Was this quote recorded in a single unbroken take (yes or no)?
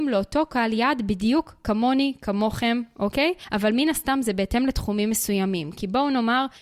yes